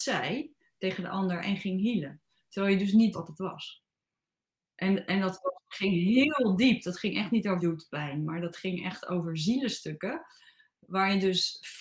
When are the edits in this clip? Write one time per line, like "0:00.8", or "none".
0:03.1
0:07.6